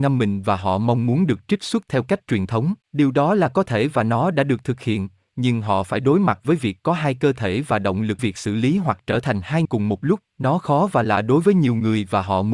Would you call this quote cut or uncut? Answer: cut